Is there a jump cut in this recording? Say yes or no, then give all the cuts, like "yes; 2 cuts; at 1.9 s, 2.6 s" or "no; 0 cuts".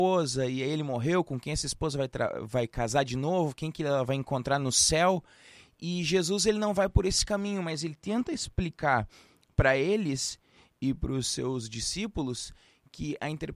no; 0 cuts